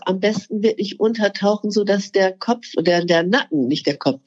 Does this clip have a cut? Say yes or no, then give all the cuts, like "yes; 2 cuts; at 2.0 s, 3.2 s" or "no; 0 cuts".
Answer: no; 0 cuts